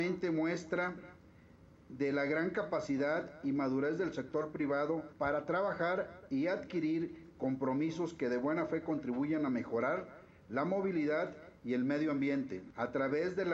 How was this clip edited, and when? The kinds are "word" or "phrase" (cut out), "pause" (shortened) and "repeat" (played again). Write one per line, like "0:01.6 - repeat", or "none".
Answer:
0:05.1 - pause